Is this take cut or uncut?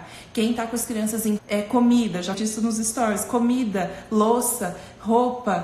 cut